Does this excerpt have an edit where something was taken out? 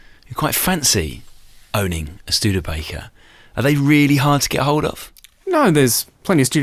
no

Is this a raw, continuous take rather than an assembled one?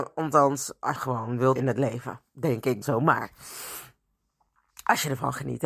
no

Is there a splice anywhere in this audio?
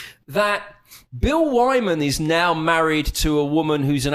no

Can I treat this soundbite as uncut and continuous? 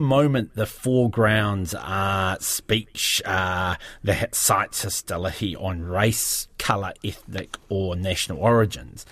yes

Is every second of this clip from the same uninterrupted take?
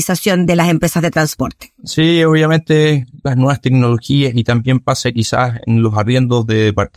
yes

